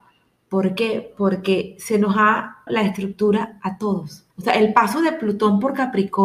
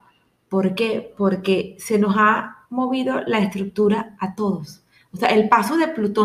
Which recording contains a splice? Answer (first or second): first